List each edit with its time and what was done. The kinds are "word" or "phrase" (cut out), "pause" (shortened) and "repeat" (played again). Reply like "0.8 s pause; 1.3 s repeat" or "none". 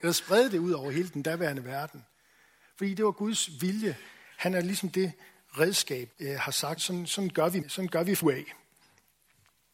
6.1 s word; 6.8 s word; 7.6 s word; 8.2 s word